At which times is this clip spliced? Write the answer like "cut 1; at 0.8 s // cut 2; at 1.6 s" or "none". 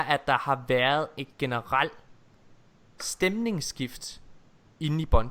none